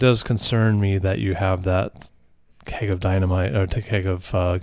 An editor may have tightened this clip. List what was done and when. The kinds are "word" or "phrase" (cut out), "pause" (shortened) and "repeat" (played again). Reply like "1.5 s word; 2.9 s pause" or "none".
none